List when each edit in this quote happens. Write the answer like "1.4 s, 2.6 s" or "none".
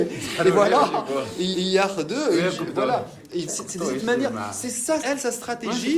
1.5 s, 3.5 s, 5.0 s